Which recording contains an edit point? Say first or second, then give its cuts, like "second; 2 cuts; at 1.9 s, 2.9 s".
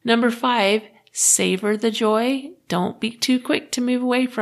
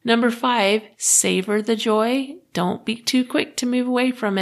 second; 1 cut; at 0.9 s